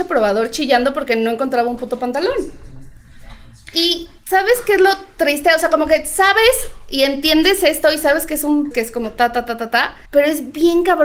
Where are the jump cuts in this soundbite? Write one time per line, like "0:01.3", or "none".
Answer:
0:04.2
0:08.7
0:10.1